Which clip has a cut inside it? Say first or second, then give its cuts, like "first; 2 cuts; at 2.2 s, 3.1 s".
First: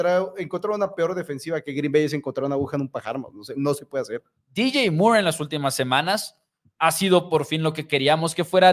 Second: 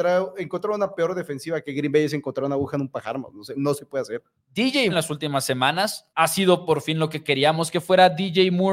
second; 2 cuts; at 4.9 s, 6.1 s